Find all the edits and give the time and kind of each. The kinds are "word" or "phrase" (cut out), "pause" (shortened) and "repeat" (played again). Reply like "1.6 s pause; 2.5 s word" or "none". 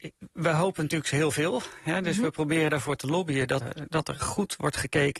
3.6 s word